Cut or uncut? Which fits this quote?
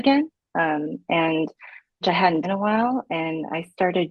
cut